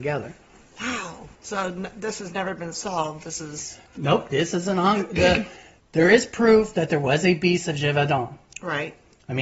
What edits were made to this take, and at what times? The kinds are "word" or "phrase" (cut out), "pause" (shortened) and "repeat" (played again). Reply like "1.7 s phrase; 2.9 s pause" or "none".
1.3 s pause; 5.8 s pause